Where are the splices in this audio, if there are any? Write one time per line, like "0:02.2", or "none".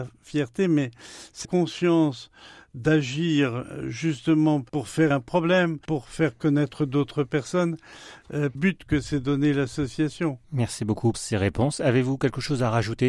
0:01.4
0:04.7
0:05.1
0:05.8
0:08.5
0:10.4
0:11.1